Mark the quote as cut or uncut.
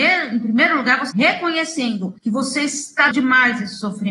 cut